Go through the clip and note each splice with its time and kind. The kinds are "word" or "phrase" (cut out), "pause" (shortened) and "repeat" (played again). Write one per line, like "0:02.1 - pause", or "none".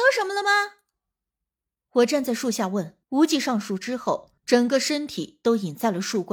0:03.0 - pause
0:04.4 - pause